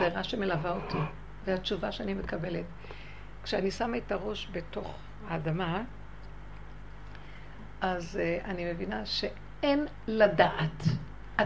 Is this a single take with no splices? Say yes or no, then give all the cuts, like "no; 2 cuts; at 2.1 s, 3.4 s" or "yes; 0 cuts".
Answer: yes; 0 cuts